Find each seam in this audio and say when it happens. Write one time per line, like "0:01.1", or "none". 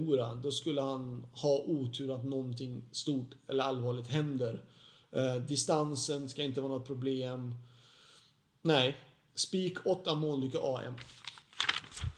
none